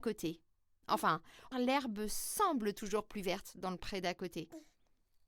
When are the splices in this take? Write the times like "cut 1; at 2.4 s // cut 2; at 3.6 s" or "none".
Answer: cut 1; at 1.5 s